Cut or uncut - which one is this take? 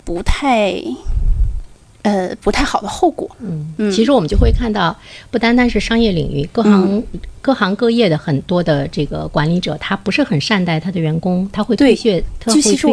cut